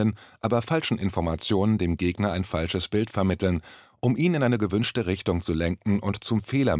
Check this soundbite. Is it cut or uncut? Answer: uncut